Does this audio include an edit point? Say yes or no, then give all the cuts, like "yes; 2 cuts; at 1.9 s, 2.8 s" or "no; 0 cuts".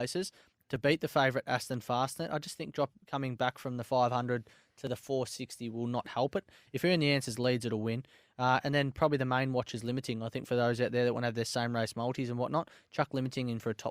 no; 0 cuts